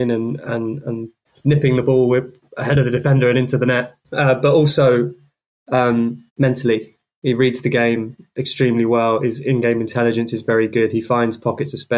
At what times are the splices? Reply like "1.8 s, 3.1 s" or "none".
1.3 s, 4.0 s, 6.3 s

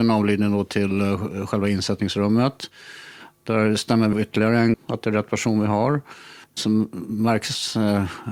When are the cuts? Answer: 4.1 s, 4.7 s, 6.4 s

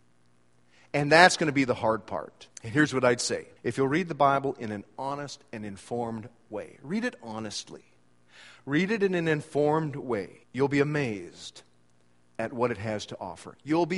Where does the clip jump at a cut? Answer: 2.5 s, 3.6 s, 10.4 s

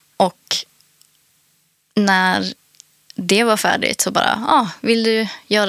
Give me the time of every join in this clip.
none

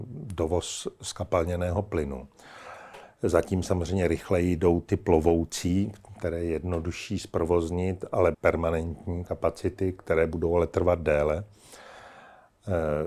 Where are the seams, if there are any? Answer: 8.3 s

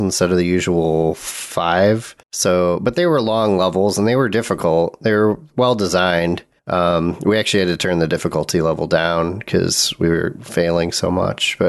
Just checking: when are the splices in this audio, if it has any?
2.2 s, 6.6 s

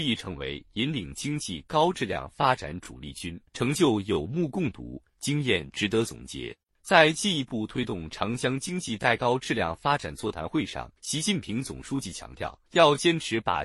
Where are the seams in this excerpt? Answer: 3.5 s, 6.6 s, 11.0 s, 12.7 s

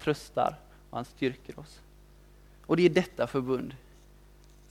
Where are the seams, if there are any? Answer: none

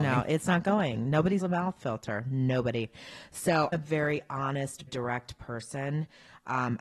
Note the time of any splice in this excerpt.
1.4 s, 3.7 s, 4.9 s

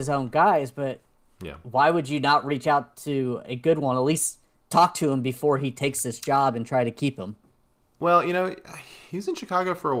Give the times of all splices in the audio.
none

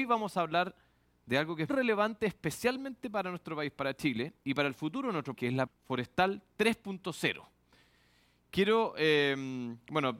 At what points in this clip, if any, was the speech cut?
1.7 s, 5.3 s, 5.7 s

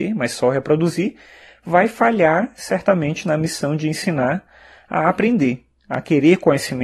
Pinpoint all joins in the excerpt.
none

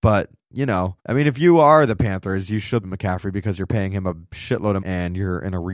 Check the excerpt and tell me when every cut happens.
1.0 s, 2.8 s, 4.8 s

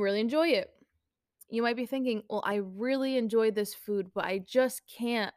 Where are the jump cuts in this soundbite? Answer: none

